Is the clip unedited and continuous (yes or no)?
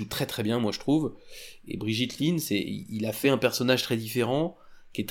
yes